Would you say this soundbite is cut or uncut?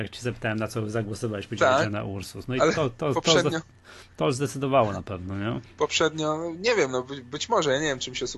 uncut